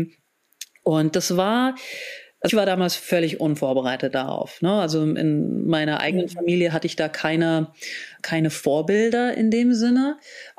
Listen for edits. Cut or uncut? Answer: cut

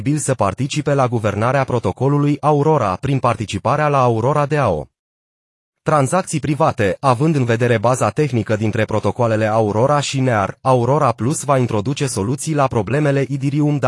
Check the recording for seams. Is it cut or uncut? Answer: uncut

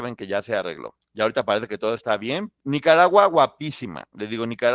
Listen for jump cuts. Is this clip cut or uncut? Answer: cut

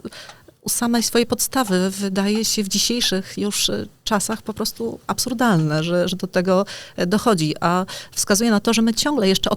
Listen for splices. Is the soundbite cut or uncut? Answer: uncut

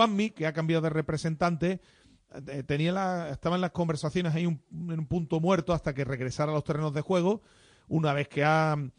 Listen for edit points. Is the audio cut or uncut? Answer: uncut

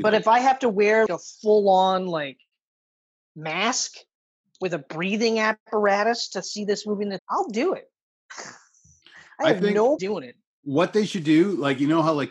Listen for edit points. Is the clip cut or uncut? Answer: cut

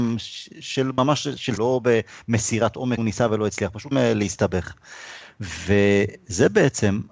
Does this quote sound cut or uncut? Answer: cut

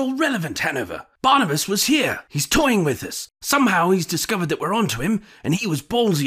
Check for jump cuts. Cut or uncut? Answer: uncut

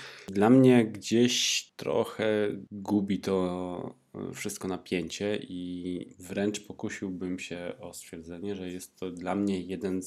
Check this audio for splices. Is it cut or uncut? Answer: cut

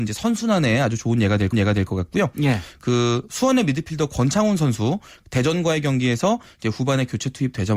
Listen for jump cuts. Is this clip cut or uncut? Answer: cut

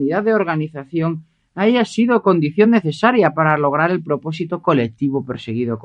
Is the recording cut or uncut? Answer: uncut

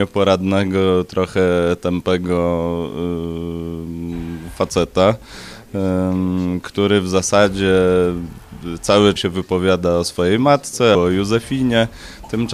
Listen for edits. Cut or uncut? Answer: cut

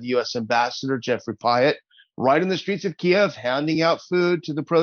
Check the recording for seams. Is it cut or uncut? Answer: uncut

